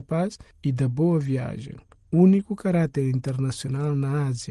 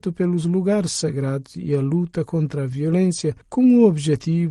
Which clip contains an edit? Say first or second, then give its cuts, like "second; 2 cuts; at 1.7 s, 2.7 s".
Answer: second; 1 cut; at 3.4 s